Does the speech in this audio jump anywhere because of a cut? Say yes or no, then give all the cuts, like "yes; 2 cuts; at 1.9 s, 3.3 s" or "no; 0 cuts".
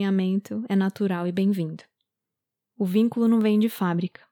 no; 0 cuts